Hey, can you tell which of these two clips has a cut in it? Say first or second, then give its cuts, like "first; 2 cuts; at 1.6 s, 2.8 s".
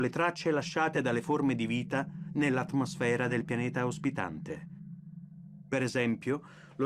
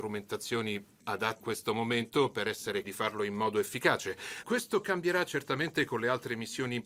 second; 3 cuts; at 1.4 s, 2.8 s, 4.4 s